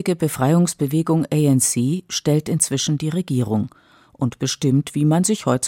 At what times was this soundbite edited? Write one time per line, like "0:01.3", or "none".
none